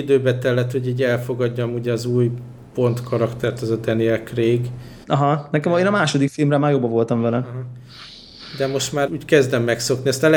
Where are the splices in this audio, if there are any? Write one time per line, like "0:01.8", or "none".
0:05.0
0:09.1